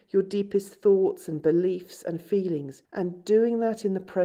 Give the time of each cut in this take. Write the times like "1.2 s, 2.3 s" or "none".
2.8 s